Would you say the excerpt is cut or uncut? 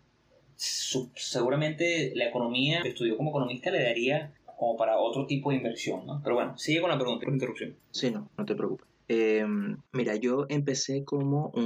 cut